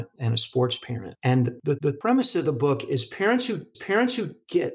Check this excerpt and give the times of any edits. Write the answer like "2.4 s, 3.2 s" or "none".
1.8 s, 3.7 s